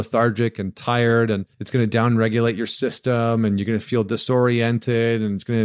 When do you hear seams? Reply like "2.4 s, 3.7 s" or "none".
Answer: 1.5 s